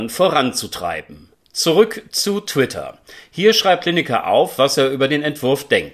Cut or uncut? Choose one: uncut